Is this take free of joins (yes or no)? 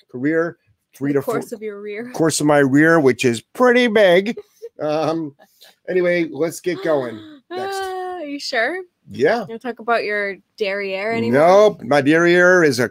yes